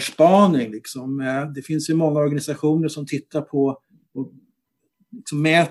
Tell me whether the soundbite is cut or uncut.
uncut